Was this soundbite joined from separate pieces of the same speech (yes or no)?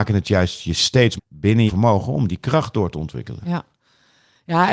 yes